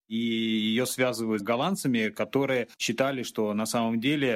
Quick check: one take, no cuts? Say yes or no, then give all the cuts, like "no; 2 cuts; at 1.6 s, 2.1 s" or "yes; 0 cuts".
no; 2 cuts; at 1.4 s, 2.7 s